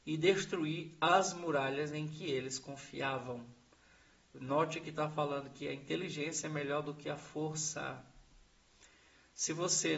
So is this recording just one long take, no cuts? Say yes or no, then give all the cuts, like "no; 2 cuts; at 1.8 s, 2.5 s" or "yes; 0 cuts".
yes; 0 cuts